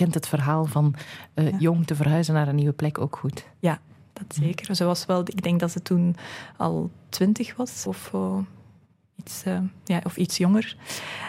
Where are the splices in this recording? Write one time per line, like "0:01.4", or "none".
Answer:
0:07.9